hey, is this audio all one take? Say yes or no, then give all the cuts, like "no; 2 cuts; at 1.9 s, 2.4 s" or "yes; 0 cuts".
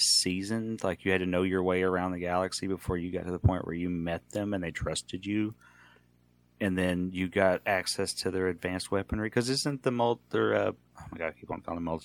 yes; 0 cuts